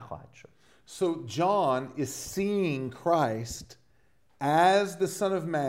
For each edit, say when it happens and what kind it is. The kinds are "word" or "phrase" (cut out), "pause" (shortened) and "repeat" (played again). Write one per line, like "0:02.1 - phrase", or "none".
none